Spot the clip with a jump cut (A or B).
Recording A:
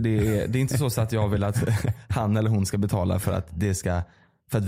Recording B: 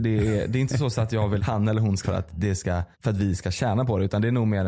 B